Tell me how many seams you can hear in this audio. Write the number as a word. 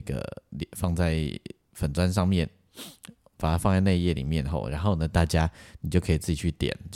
zero